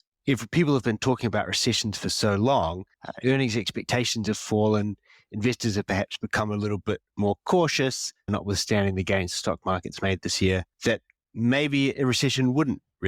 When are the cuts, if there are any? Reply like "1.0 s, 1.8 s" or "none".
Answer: 2.9 s, 10.7 s